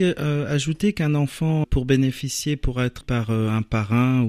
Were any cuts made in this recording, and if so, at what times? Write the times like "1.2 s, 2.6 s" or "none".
1.6 s, 3.0 s